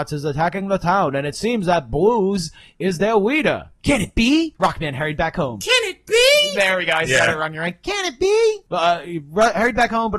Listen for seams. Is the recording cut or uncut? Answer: uncut